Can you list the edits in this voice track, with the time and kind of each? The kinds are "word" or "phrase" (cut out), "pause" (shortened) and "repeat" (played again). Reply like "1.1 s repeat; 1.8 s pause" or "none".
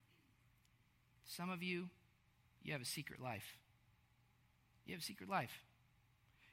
none